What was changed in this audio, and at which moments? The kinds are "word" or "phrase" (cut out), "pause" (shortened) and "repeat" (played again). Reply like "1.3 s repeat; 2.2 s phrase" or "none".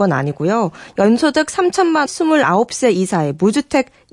2.1 s word